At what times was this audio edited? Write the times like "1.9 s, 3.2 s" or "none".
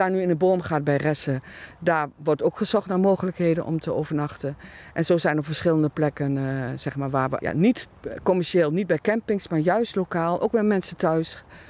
7.4 s